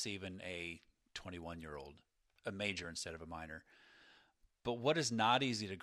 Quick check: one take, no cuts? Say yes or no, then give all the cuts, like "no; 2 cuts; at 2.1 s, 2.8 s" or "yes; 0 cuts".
yes; 0 cuts